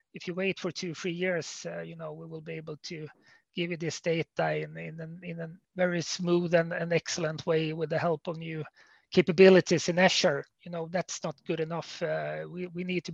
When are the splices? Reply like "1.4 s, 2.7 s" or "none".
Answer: 5.6 s

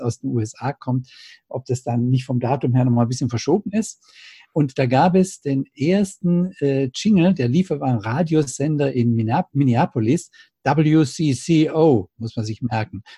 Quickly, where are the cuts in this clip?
none

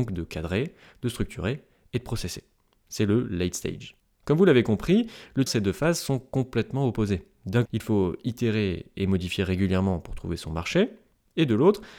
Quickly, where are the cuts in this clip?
4.0 s, 5.5 s, 7.7 s

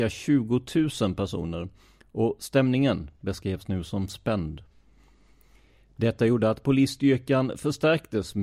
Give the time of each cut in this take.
none

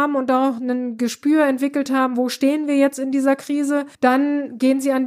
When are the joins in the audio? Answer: 3.9 s

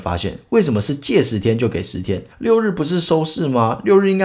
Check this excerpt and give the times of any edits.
2.3 s

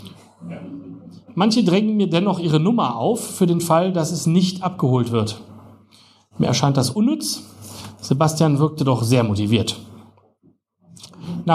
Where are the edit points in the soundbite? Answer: none

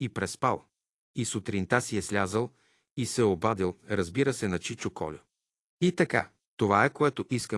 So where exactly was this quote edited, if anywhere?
6.4 s

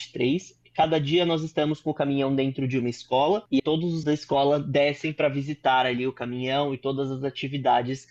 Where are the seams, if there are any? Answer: 3.6 s, 4.0 s

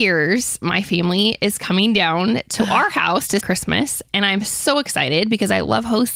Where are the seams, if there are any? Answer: 3.4 s

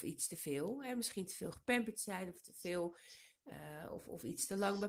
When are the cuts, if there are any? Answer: none

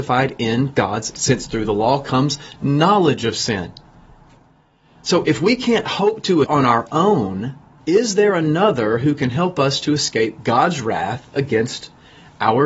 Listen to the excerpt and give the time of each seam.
1.1 s, 5.2 s, 6.4 s, 7.8 s

